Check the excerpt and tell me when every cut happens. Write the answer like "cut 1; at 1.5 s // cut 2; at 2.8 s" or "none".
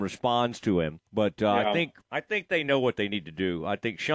cut 1; at 1.1 s // cut 2; at 2.0 s